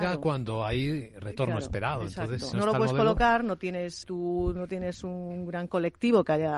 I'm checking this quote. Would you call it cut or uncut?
cut